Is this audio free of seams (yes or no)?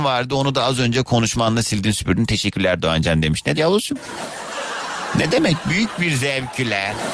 no